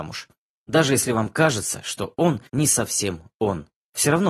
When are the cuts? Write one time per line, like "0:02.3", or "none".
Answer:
0:02.5